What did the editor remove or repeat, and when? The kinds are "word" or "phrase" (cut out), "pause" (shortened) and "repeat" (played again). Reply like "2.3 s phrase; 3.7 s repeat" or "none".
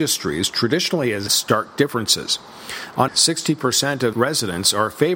1.3 s word; 3.1 s word; 4.1 s word